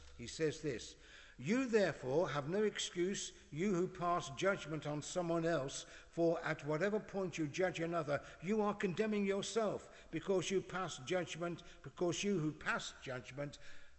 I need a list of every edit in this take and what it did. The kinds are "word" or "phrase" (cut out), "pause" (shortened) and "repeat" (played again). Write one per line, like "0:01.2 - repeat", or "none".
none